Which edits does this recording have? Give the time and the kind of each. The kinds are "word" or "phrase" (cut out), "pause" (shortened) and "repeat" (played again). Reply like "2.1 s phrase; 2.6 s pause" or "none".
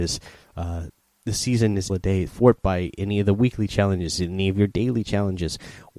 1.0 s pause; 1.9 s phrase; 2.3 s word